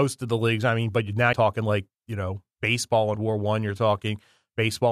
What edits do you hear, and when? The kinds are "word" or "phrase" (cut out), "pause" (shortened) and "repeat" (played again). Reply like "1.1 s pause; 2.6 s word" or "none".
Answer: 1.3 s phrase; 2.0 s pause; 2.5 s pause; 3.2 s word